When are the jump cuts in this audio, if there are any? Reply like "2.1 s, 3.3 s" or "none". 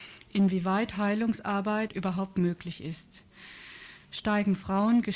1.9 s